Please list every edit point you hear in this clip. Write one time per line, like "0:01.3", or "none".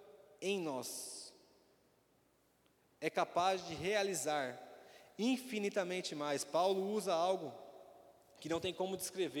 none